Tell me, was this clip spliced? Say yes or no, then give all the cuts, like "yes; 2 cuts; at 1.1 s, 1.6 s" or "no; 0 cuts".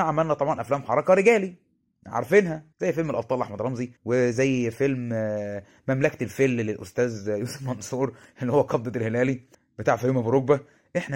yes; 3 cuts; at 2.7 s, 4.0 s, 9.5 s